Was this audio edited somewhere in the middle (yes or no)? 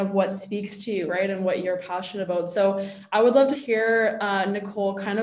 yes